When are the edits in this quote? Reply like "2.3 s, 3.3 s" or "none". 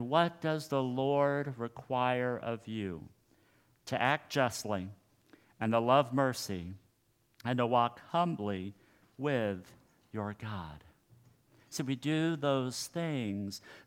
none